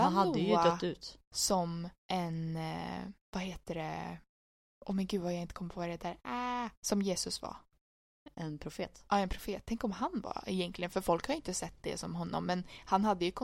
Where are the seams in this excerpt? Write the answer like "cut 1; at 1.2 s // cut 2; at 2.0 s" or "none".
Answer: cut 1; at 2.0 s // cut 2; at 3.2 s // cut 3; at 6.8 s